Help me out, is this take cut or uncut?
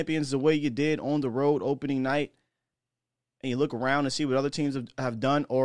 uncut